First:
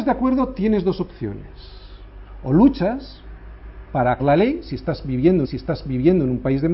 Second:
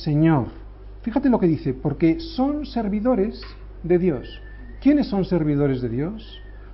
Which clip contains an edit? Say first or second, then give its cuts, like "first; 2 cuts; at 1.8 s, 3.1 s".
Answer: first; 2 cuts; at 4.2 s, 5.4 s